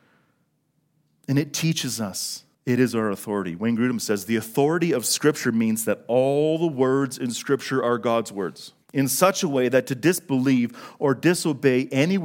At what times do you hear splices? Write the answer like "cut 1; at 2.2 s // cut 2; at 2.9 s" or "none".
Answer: cut 1; at 2.5 s // cut 2; at 8.8 s